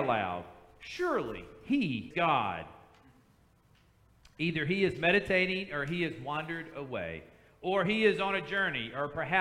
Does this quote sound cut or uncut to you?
cut